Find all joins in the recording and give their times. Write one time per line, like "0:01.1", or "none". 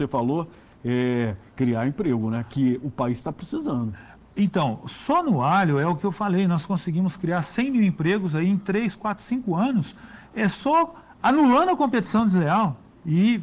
none